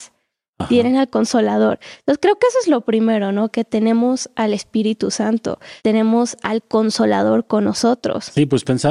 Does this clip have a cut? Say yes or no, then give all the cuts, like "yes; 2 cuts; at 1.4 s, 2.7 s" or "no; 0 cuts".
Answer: yes; 1 cut; at 5.8 s